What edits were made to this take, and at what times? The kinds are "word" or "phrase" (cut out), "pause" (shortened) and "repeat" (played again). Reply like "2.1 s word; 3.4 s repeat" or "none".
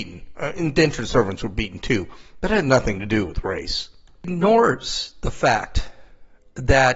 none